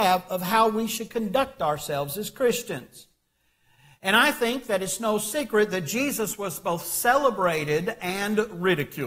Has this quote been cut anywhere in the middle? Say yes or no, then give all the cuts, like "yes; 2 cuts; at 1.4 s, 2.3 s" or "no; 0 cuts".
no; 0 cuts